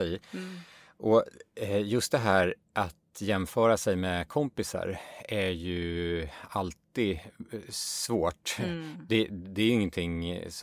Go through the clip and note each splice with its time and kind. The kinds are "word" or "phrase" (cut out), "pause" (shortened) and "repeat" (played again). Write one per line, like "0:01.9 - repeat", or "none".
none